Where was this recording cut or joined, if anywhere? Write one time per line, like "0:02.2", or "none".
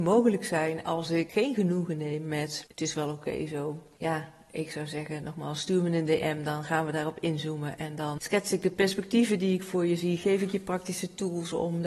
none